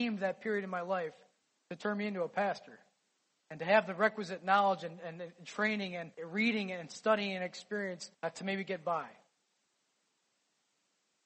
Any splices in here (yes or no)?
yes